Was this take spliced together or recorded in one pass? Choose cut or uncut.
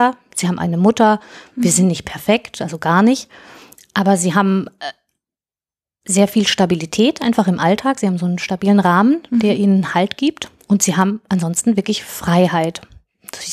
uncut